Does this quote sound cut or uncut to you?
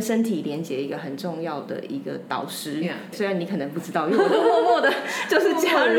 cut